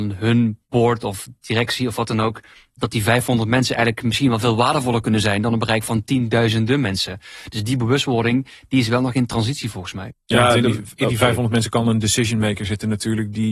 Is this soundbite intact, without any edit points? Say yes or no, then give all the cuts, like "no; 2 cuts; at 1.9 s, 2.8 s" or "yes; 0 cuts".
yes; 0 cuts